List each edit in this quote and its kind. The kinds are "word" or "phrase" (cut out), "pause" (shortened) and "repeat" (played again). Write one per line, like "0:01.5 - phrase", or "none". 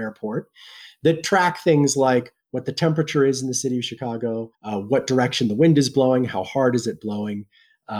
0:04.5 - pause